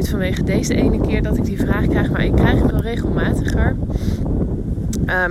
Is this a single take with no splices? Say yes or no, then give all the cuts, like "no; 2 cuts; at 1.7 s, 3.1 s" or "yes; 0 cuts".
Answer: no; 1 cut; at 2.7 s